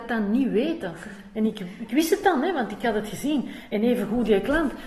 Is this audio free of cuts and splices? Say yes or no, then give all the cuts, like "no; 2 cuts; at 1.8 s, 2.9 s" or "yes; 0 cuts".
yes; 0 cuts